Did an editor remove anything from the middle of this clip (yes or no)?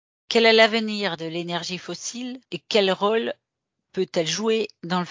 yes